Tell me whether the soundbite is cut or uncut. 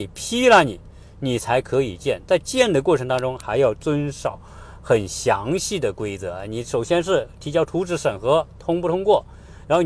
cut